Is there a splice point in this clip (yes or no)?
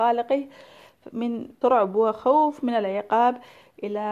yes